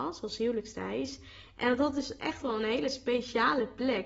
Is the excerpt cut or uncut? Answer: uncut